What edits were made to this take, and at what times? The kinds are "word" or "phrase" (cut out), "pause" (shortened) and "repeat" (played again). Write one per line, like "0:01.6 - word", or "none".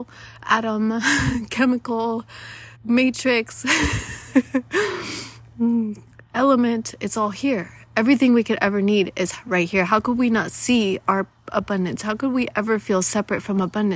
0:02.7 - pause